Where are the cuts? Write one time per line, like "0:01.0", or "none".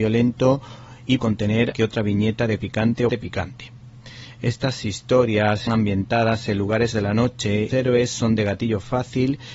0:01.2
0:01.7
0:02.6
0:03.1
0:05.7
0:06.9
0:07.7